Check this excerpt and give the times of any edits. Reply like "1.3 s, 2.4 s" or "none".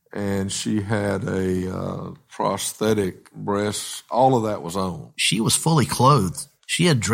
none